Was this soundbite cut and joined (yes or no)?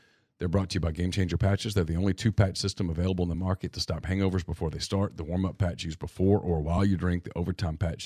no